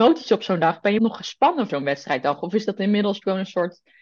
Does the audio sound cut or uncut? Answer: cut